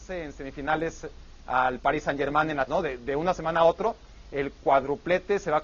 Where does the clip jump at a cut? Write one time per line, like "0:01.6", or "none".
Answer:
0:02.7